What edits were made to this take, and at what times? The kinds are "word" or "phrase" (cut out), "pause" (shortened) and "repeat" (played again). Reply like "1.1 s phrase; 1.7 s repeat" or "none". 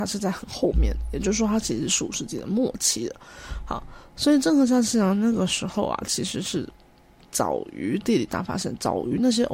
none